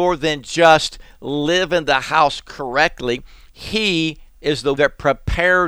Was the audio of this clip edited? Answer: yes; 2 cuts; at 4.3 s, 4.8 s

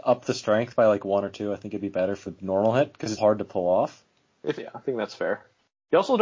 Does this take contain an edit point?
yes; 3 cuts; at 2.2 s, 3.2 s, 4.6 s

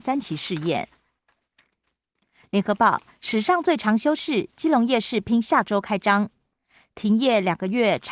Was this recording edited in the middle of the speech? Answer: no; 0 cuts

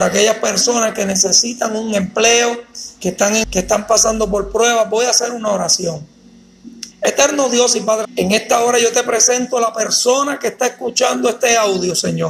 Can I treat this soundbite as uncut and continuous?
no; 3 cuts; at 3.4 s, 6.9 s, 8.0 s

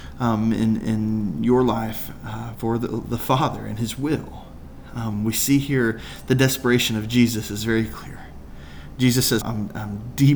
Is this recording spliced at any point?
yes; 2 cuts; at 2.5 s, 9.4 s

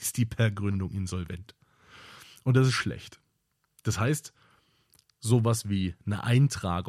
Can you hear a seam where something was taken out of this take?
no; 0 cuts

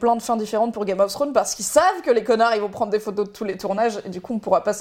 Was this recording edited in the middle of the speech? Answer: no; 0 cuts

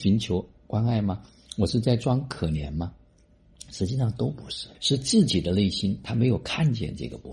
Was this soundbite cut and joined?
yes; 1 cut; at 4.7 s

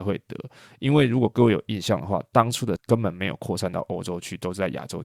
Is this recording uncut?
no; 1 cut; at 2.8 s

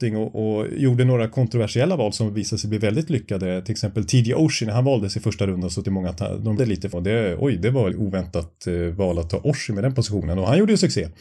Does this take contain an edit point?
yes; 4 cuts; at 5.8 s, 6.6 s, 6.9 s, 7.9 s

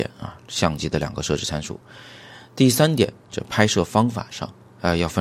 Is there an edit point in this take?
no; 0 cuts

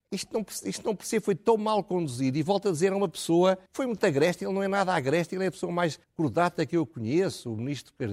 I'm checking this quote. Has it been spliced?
yes; 2 cuts; at 3.7 s, 6.0 s

